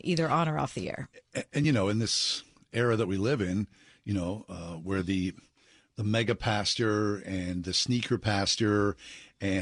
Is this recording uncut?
yes; 0 cuts

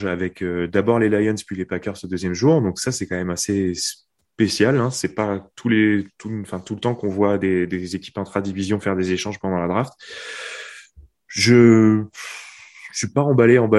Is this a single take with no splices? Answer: yes; 0 cuts

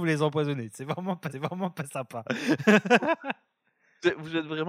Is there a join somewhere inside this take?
yes; 1 cut; at 1.3 s

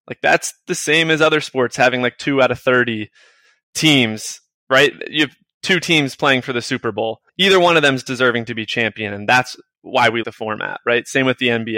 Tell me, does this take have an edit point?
yes; 2 cuts; at 7.3 s, 10.2 s

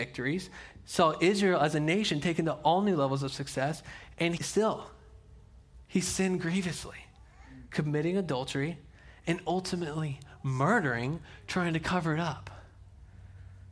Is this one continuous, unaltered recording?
no; 1 cut; at 4.4 s

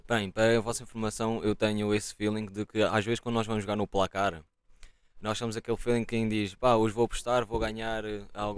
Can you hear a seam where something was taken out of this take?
no; 0 cuts

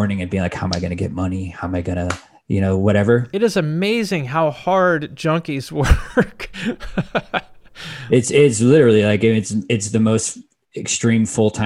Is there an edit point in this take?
no; 0 cuts

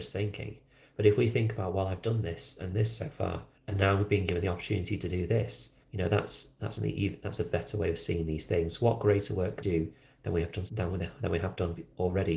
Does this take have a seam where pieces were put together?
yes; 4 cuts; at 3.5 s, 5.8 s, 9.6 s, 10.7 s

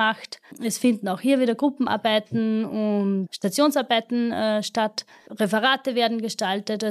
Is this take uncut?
yes; 0 cuts

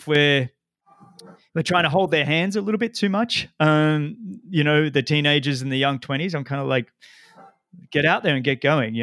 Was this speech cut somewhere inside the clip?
no; 0 cuts

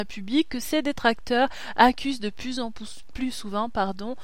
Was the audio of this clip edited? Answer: no; 0 cuts

